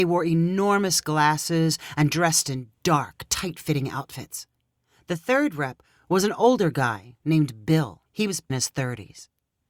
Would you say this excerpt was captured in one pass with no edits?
no; 2 cuts; at 8.1 s, 8.5 s

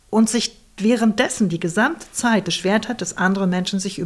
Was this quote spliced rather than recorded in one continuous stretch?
yes; 1 cut; at 2.4 s

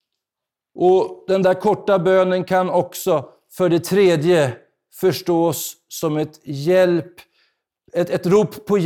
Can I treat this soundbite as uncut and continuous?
yes; 0 cuts

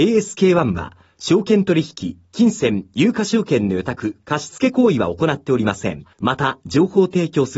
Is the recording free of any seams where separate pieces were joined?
no; 1 cut; at 6.1 s

